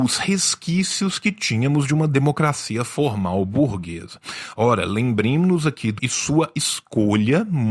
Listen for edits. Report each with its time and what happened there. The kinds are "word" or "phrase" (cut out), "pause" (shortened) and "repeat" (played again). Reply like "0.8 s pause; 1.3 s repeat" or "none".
6.0 s word